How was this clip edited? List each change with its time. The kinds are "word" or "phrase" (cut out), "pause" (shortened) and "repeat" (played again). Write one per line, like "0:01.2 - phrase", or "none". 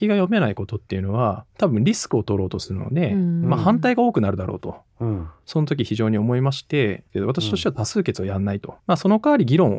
0:01.5 - pause
0:08.8 - pause